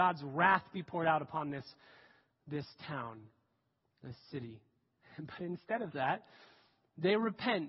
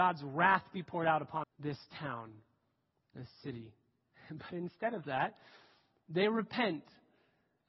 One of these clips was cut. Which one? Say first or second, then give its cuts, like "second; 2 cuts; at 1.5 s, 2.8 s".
second; 1 cut; at 1.4 s